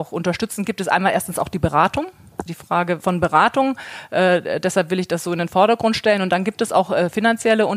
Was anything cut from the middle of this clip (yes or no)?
yes